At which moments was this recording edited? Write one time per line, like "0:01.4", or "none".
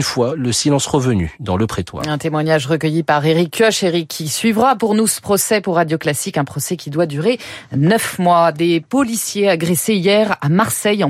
none